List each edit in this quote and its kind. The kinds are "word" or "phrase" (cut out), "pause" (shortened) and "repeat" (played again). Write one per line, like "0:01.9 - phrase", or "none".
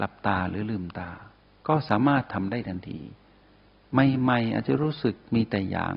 none